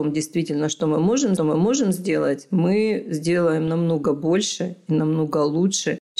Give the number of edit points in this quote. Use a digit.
1